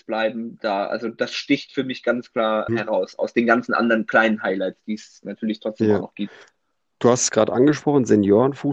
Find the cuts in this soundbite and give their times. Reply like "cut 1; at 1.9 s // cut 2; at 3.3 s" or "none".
cut 1; at 2.7 s